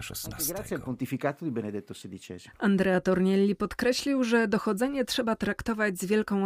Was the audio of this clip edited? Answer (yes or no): no